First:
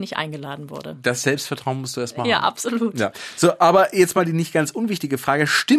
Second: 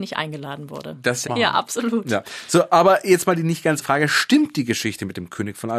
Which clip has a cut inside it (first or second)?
second